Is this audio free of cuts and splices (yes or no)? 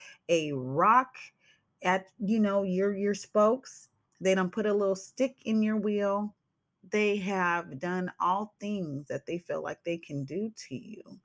yes